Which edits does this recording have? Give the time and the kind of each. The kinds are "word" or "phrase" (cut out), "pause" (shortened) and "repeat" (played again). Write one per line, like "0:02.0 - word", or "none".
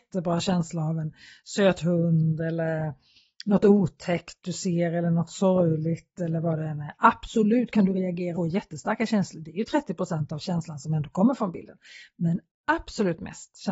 0:08.4 - word